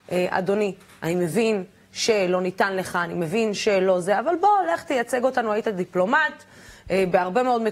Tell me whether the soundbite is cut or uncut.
uncut